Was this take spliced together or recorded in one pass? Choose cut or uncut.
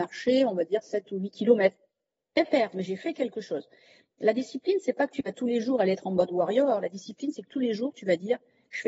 uncut